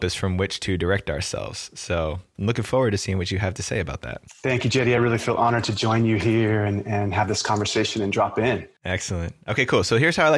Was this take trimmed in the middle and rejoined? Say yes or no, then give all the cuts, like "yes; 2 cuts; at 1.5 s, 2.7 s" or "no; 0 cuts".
no; 0 cuts